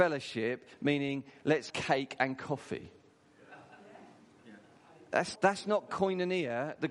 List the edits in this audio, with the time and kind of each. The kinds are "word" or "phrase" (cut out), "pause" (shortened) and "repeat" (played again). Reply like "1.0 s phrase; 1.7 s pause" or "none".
1.7 s word; 5.4 s word